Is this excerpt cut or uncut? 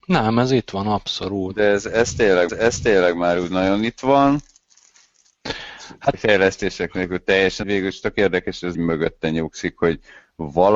cut